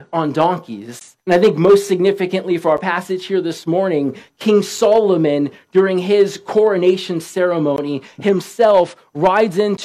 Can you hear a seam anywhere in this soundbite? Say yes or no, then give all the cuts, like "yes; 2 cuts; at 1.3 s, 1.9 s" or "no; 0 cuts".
yes; 1 cut; at 1.2 s